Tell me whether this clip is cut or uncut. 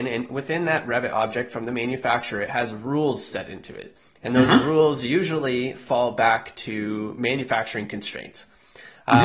uncut